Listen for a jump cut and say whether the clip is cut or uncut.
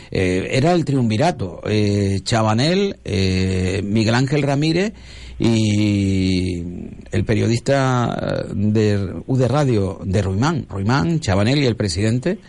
cut